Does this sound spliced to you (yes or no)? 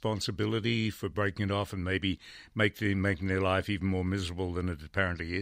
no